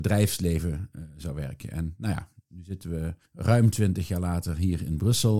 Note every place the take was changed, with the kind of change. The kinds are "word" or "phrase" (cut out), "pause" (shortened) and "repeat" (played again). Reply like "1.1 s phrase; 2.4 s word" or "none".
3.3 s pause